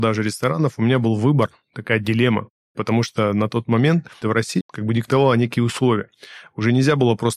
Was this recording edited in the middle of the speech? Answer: yes; 2 cuts; at 4.2 s, 4.6 s

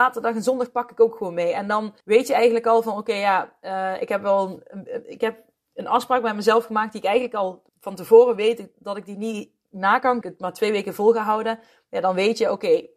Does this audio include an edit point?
yes; 3 cuts; at 2.0 s, 7.7 s, 10.2 s

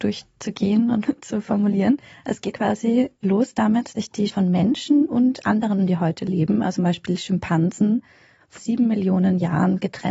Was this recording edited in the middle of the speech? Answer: yes; 7 cuts; at 1.0 s, 2.5 s, 3.9 s, 4.3 s, 5.8 s, 6.8 s, 8.6 s

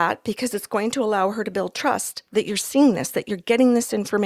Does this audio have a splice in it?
no; 0 cuts

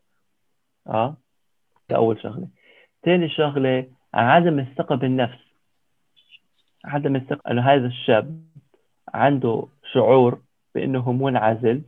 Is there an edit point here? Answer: yes; 2 cuts; at 1.9 s, 7.4 s

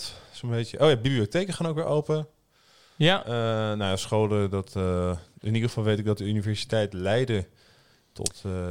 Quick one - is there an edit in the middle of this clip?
no; 0 cuts

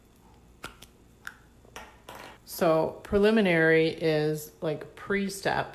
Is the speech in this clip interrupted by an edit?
yes; 1 cut; at 2.4 s

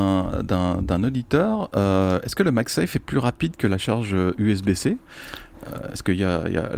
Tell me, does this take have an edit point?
no; 0 cuts

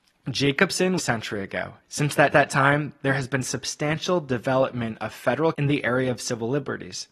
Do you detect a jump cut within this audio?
yes; 4 cuts; at 1.0 s, 1.8 s, 2.3 s, 5.5 s

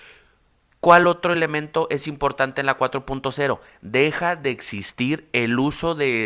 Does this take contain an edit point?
no; 0 cuts

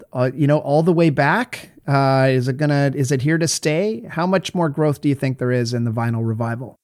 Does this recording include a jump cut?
no; 0 cuts

